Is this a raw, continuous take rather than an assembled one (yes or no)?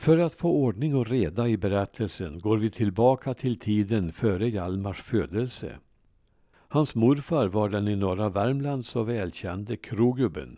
yes